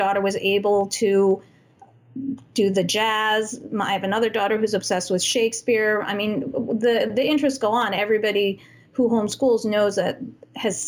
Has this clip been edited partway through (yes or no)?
no